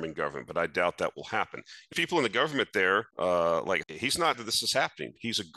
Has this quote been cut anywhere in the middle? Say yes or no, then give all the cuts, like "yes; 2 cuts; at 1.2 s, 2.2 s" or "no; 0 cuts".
yes; 4 cuts; at 1.9 s, 3.1 s, 3.8 s, 4.3 s